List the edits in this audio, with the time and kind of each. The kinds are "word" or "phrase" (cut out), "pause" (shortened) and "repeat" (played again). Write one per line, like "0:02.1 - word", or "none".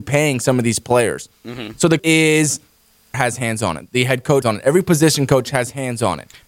0:02.0 - word
0:03.1 - phrase
0:04.4 - phrase